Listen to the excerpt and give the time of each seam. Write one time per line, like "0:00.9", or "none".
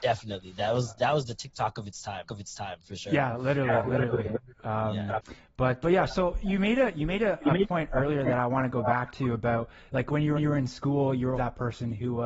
0:02.3
0:05.8
0:10.4
0:11.3